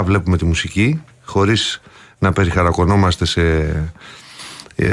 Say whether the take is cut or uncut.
uncut